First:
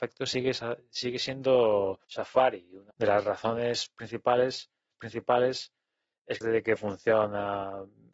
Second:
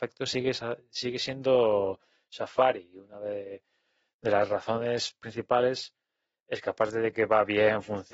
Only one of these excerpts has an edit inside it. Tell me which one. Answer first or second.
first